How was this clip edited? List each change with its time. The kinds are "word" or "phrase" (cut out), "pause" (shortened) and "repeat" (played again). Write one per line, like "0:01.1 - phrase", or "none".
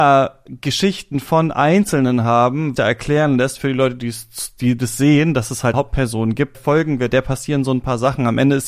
0:02.8 - phrase
0:05.7 - word
0:06.5 - word
0:07.1 - word